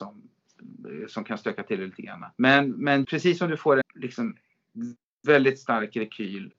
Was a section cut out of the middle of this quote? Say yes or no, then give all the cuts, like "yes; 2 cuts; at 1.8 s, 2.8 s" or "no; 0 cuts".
yes; 3 cuts; at 2.3 s, 3.0 s, 3.8 s